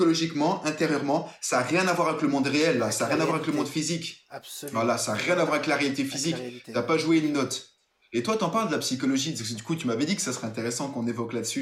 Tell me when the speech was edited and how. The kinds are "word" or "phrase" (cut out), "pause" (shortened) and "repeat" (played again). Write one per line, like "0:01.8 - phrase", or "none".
0:07.9 - pause